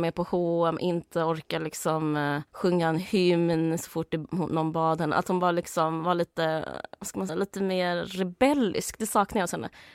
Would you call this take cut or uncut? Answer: cut